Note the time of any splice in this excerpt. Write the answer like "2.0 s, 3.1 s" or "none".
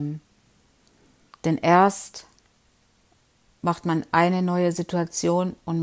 none

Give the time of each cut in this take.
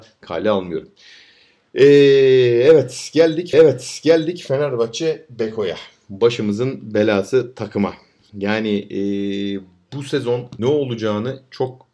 3.5 s, 10.6 s

